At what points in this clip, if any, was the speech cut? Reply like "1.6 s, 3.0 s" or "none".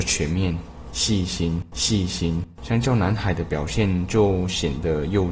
1.7 s